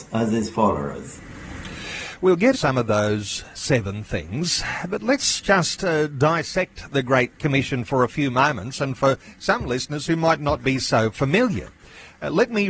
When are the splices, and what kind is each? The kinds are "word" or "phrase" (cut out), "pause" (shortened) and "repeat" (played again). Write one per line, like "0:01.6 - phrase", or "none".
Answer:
0:02.5 - word